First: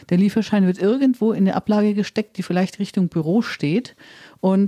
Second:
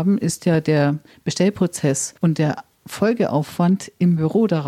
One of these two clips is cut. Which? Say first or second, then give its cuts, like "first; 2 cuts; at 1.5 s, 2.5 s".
second; 1 cut; at 2.2 s